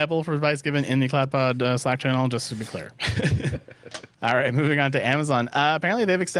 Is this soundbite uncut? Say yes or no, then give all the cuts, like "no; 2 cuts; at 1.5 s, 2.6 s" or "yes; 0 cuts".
no; 1 cut; at 4.1 s